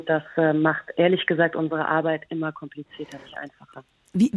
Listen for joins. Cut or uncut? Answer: uncut